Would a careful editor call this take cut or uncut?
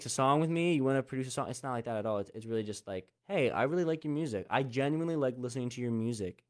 cut